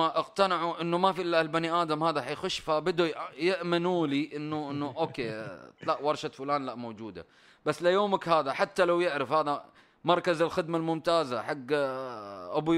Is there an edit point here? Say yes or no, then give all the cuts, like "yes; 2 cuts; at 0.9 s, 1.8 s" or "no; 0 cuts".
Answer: no; 0 cuts